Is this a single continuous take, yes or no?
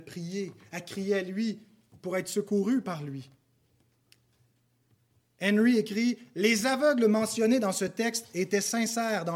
yes